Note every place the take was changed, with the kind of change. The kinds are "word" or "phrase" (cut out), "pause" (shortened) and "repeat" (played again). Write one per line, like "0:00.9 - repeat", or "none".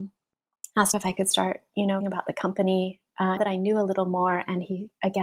0:00.9 - word
0:02.0 - word
0:03.4 - word